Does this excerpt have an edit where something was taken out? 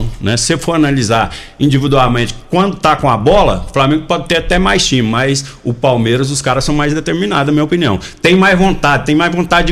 no; 0 cuts

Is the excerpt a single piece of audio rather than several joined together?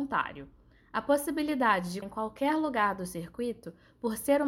no; 1 cut; at 2.0 s

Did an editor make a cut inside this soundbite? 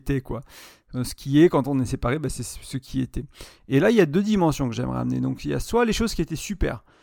no; 0 cuts

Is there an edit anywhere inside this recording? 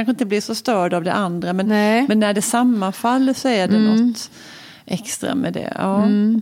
no; 0 cuts

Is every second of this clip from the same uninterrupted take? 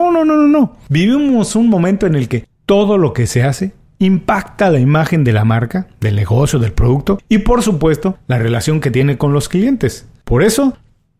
yes; 0 cuts

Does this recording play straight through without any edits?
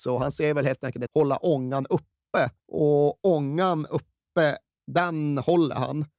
no; 2 cuts; at 1.1 s, 2.6 s

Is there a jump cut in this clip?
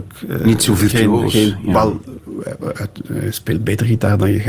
no; 0 cuts

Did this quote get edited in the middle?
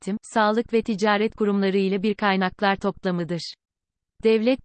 no; 0 cuts

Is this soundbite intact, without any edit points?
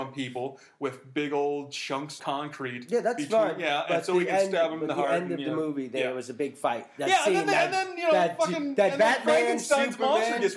no; 1 cut; at 2.2 s

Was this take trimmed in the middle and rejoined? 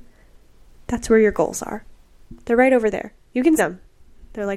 yes; 1 cut; at 3.6 s

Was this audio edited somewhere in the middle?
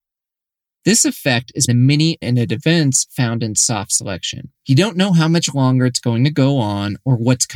yes; 3 cuts; at 1.7 s, 2.2 s, 4.5 s

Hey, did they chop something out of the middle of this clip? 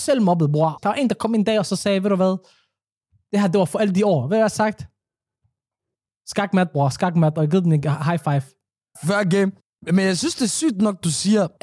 no; 0 cuts

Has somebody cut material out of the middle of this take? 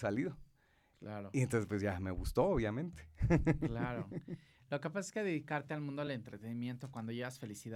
no; 0 cuts

